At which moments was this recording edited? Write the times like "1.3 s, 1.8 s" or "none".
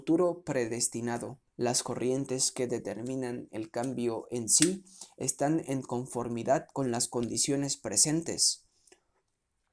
1.5 s